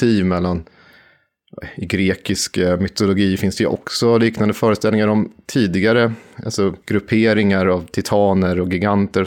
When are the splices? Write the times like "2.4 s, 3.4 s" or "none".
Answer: 6.8 s